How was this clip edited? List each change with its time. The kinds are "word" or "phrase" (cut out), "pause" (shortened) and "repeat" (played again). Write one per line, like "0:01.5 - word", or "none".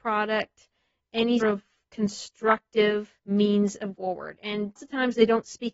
0:01.4 - word
0:03.2 - pause
0:03.9 - word
0:04.8 - word